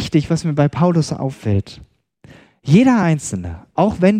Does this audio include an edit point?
no; 0 cuts

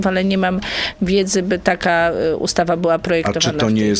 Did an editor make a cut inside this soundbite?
no; 0 cuts

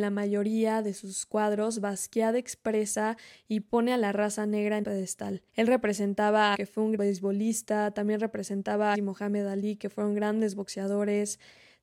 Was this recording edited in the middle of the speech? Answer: yes; 5 cuts; at 4.8 s, 5.5 s, 6.5 s, 7.0 s, 8.9 s

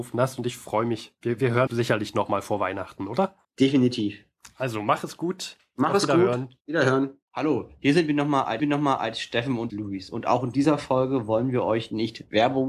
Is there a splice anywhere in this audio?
yes; 6 cuts; at 1.7 s, 3.4 s, 6.6 s, 7.3 s, 8.6 s, 9.7 s

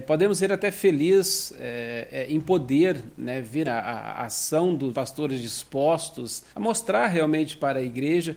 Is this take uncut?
no; 3 cuts; at 3.6 s, 4.9 s, 6.5 s

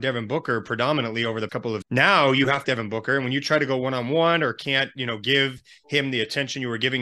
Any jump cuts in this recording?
yes; 3 cuts; at 1.5 s, 1.8 s, 2.6 s

